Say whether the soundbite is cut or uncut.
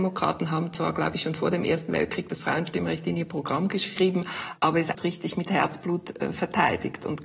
cut